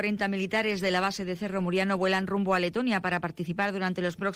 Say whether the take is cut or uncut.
uncut